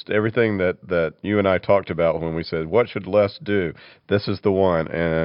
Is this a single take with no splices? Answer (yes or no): yes